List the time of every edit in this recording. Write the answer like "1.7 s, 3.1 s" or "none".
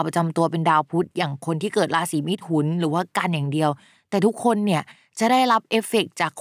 none